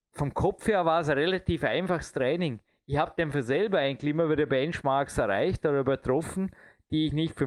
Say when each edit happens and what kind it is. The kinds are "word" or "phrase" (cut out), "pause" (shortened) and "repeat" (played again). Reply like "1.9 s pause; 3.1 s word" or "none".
none